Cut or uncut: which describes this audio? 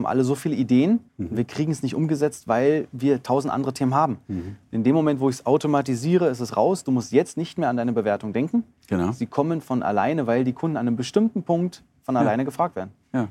cut